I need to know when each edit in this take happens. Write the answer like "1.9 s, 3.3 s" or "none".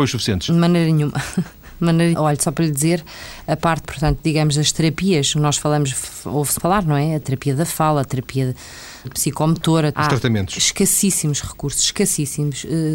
2.1 s, 3.8 s, 6.6 s, 7.2 s, 9.0 s, 9.9 s

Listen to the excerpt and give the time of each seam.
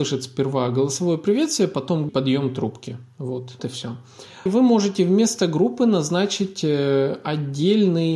2.1 s, 3.6 s, 4.5 s

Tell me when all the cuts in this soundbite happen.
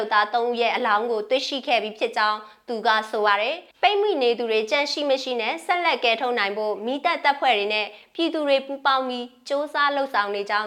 3.7 s

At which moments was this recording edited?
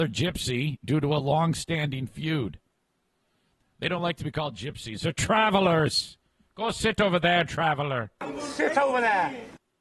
none

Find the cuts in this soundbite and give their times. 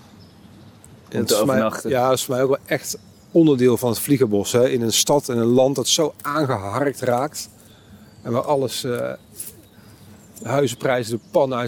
none

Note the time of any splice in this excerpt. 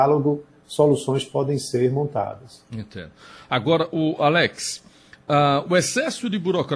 none

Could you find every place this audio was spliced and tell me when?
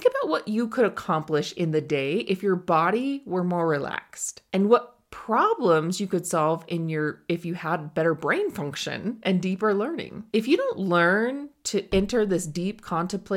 4.5 s, 10.3 s

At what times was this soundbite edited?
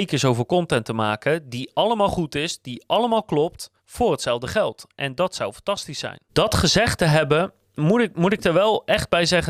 3.8 s, 6.3 s

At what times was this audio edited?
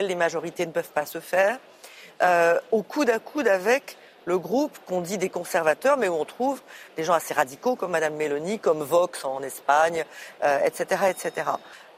none

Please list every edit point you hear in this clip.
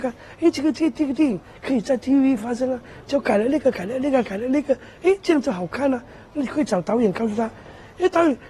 none

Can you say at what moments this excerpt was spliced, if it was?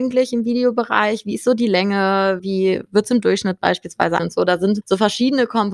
4.2 s

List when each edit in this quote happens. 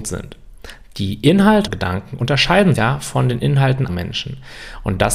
1.7 s, 2.8 s, 3.9 s

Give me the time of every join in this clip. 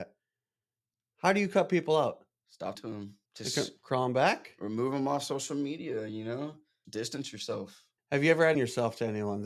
2.7 s, 3.3 s, 6.8 s, 8.5 s

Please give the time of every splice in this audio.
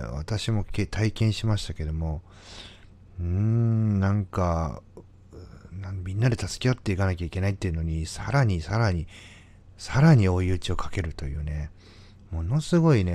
none

